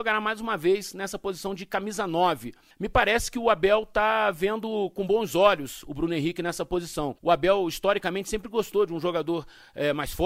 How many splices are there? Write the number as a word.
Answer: two